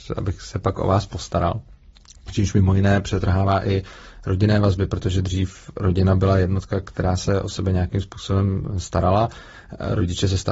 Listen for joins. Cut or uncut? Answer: uncut